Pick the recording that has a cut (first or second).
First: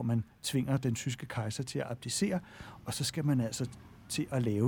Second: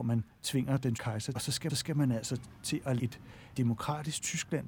second